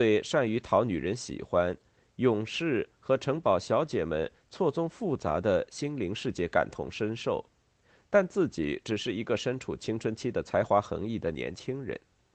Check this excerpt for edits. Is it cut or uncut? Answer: uncut